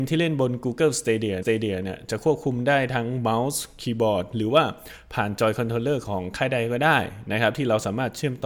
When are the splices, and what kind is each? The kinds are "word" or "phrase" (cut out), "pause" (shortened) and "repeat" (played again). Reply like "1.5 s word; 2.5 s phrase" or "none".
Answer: 1.4 s repeat